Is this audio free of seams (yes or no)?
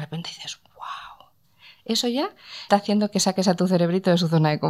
no